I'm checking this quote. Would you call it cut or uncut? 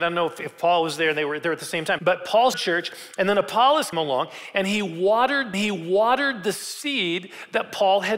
cut